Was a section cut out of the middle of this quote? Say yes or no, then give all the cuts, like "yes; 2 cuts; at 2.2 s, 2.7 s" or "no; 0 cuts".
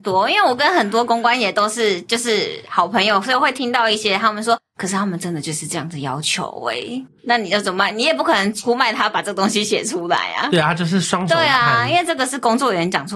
no; 0 cuts